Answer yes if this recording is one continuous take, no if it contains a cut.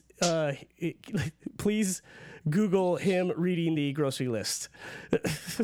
yes